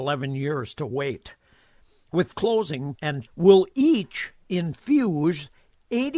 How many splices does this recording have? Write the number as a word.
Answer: three